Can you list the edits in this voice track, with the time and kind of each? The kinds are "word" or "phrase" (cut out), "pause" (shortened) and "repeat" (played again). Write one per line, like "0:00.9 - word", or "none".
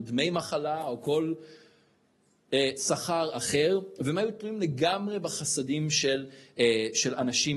none